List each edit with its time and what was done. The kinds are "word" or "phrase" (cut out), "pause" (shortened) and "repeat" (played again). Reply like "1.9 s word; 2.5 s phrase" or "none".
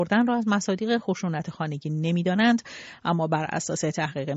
none

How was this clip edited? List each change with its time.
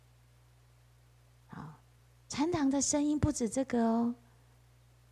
2.0 s pause

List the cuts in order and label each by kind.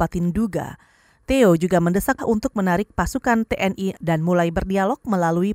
2.2 s word; 4.0 s word

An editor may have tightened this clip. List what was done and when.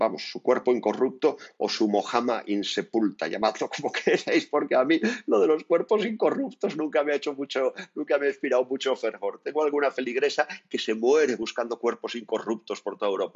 none

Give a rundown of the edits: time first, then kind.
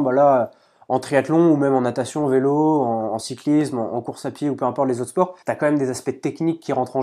5.4 s pause

